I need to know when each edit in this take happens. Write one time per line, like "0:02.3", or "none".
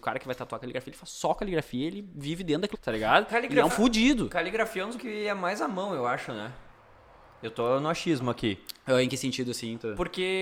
0:02.7
0:03.7
0:05.0